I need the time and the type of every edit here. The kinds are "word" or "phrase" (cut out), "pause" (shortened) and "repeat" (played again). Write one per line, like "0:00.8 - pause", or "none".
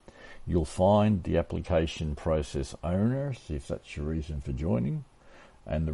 none